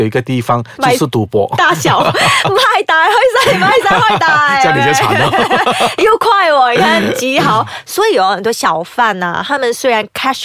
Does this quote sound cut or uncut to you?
uncut